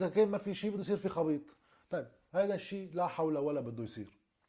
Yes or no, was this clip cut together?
no